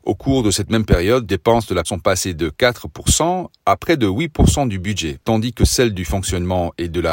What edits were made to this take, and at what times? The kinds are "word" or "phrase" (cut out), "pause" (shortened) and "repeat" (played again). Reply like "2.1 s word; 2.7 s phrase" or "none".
1.3 s word; 1.8 s word